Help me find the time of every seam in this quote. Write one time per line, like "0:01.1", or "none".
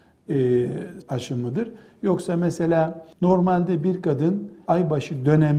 0:01.0
0:03.1
0:04.7